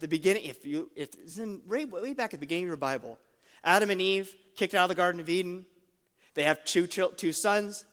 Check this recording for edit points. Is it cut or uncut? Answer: uncut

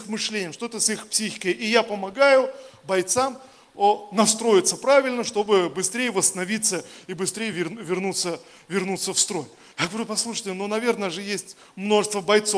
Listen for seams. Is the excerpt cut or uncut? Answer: uncut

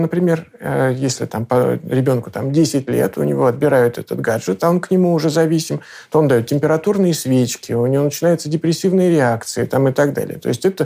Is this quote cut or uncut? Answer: uncut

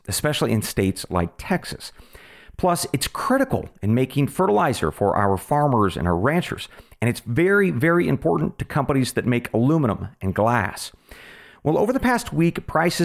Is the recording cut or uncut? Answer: uncut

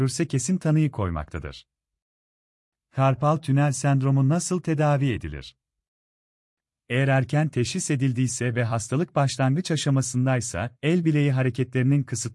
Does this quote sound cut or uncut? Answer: uncut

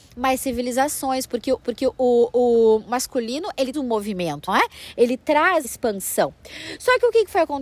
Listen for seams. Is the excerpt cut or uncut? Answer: cut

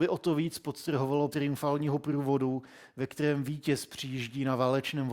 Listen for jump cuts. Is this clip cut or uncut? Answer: cut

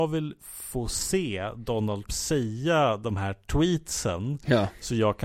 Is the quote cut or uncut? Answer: cut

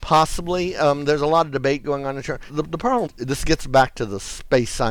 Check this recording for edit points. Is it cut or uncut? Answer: cut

